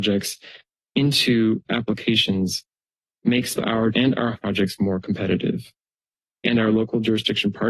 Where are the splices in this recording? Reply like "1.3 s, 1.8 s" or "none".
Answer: 1.7 s, 3.6 s, 3.9 s, 4.3 s, 6.4 s